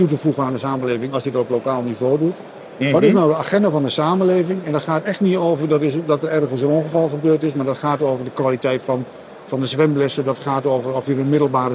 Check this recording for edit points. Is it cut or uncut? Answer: uncut